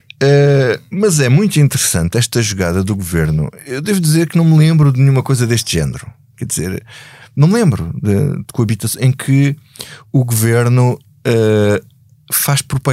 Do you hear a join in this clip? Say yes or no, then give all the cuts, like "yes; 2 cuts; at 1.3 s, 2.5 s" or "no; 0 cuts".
no; 0 cuts